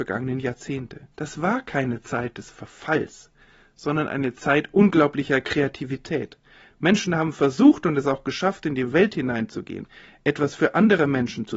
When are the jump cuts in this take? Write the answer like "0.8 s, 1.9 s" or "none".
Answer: 1.1 s